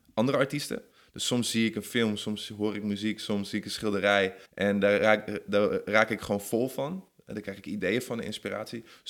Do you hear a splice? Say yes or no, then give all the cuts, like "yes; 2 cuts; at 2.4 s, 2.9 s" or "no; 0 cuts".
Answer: yes; 1 cut; at 4.5 s